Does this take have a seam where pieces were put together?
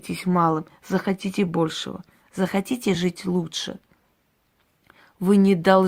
no; 0 cuts

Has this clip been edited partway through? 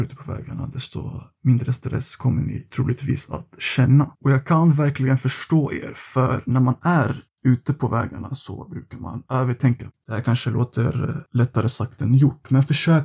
yes; 1 cut; at 4.2 s

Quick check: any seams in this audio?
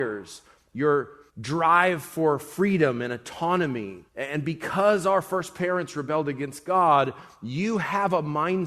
yes; 2 cuts; at 1.3 s, 4.1 s

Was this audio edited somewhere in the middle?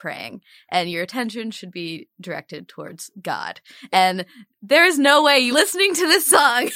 yes; 2 cuts; at 4.5 s, 5.5 s

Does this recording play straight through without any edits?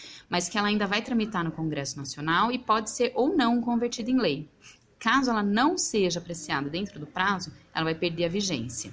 yes; 0 cuts

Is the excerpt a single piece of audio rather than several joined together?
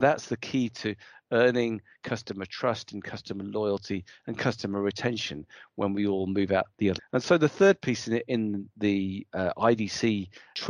no; 1 cut; at 7.0 s

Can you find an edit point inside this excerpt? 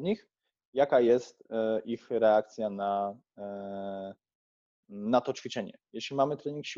no; 0 cuts

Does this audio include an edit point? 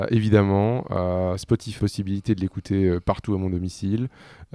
yes; 1 cut; at 1.8 s

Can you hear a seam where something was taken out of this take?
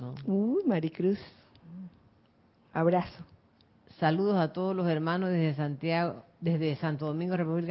no; 0 cuts

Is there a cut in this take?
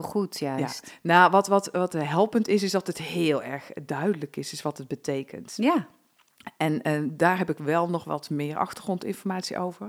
no; 0 cuts

